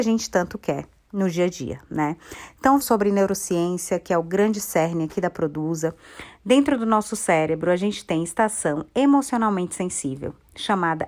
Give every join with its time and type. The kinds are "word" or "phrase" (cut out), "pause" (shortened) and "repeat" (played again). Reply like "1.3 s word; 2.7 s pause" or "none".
2.8 s word

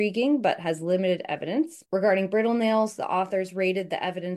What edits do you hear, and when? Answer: 1.9 s pause

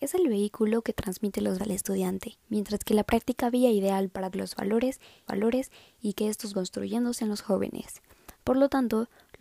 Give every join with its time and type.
1.6 s word; 2.4 s pause; 3.4 s phrase; 4.3 s word; 5.3 s repeat; 6.5 s word; 8.3 s pause

